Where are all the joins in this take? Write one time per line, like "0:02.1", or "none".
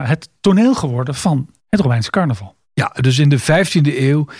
0:01.6
0:02.6